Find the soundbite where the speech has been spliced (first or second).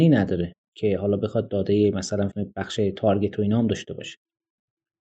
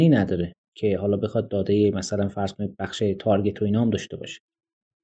first